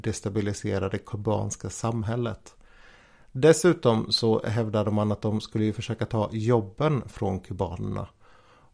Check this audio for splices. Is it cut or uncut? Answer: uncut